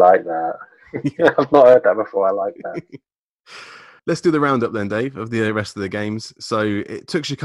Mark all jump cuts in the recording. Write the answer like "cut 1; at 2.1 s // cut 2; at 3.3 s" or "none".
cut 1; at 4.0 s

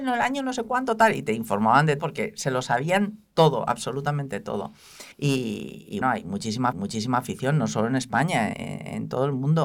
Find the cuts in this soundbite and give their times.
cut 1; at 2.0 s // cut 2; at 5.1 s // cut 3; at 6.0 s // cut 4; at 6.7 s // cut 5; at 8.5 s

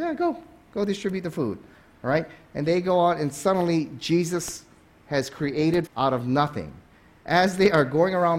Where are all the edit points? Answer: cut 1; at 5.9 s

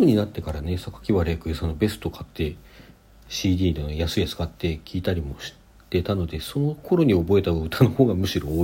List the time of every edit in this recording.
none

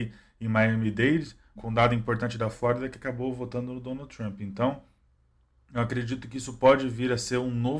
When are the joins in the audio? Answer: cut 1; at 1.6 s // cut 2; at 2.5 s

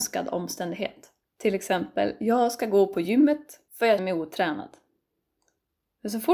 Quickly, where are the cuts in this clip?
cut 1; at 1.2 s // cut 2; at 3.7 s // cut 3; at 4.0 s

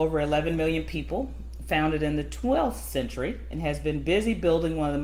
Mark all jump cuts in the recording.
none

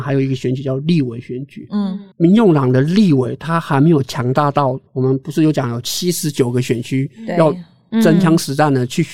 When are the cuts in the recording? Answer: cut 1; at 2.1 s // cut 2; at 4.9 s

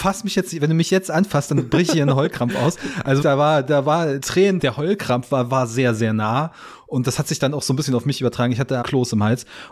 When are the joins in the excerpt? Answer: cut 1; at 3.2 s // cut 2; at 4.2 s // cut 3; at 4.6 s // cut 4; at 8.8 s

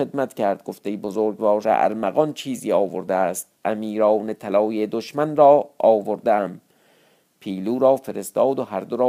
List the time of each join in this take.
cut 1; at 1.6 s // cut 2; at 3.6 s

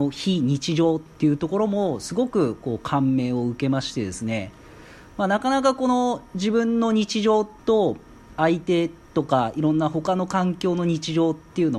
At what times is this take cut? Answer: cut 1; at 7.6 s

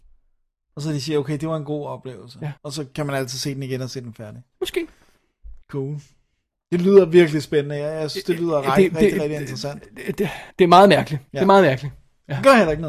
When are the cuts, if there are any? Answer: cut 1; at 2.6 s // cut 2; at 5.6 s // cut 3; at 10.5 s // cut 4; at 11.3 s

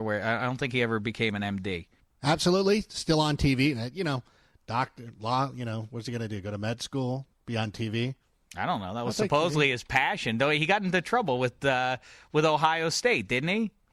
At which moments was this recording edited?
none

